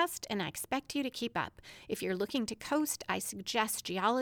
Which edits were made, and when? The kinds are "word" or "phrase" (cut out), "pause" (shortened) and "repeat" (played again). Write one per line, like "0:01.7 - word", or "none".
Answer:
none